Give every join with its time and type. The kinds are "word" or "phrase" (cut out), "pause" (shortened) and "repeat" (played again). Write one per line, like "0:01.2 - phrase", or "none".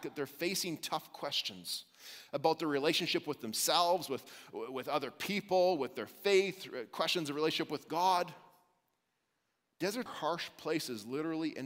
0:10.1 - word